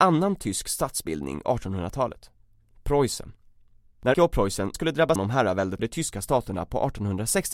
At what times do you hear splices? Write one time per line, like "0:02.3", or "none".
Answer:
0:01.4
0:04.1
0:04.7
0:05.2
0:05.8